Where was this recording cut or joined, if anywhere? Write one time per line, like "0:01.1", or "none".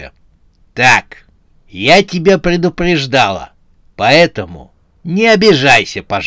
none